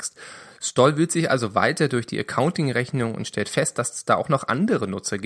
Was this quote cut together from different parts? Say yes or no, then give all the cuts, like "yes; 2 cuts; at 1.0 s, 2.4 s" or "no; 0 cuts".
no; 0 cuts